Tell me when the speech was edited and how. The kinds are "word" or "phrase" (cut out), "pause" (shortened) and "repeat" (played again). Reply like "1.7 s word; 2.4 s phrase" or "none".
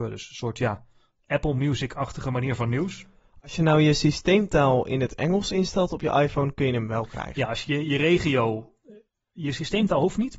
none